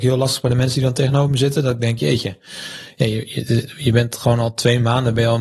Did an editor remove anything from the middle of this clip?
no; 0 cuts

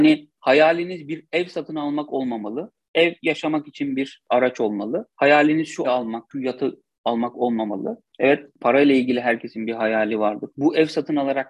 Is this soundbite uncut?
no; 2 cuts; at 5.8 s, 10.5 s

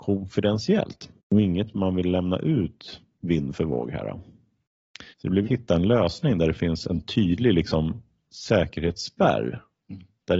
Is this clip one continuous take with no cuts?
no; 3 cuts; at 1.2 s, 5.1 s, 5.4 s

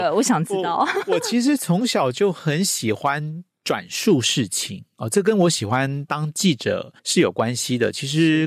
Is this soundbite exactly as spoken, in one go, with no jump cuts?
no; 1 cut; at 7.0 s

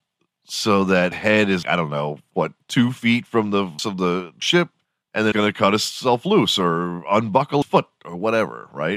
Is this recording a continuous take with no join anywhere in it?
no; 6 cuts; at 1.1 s, 1.6 s, 3.8 s, 4.4 s, 5.3 s, 7.6 s

